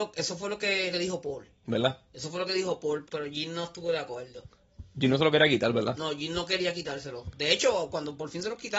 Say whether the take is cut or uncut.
cut